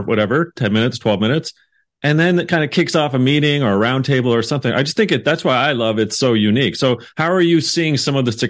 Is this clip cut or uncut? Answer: uncut